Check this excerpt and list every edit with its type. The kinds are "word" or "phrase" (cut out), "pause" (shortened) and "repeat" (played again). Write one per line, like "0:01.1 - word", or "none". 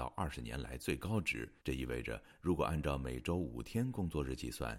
0:01.6 - pause